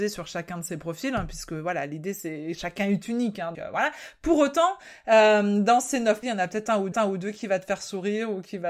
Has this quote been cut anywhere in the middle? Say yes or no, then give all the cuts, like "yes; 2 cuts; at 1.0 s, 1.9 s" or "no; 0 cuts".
yes; 3 cuts; at 3.5 s, 6.2 s, 6.9 s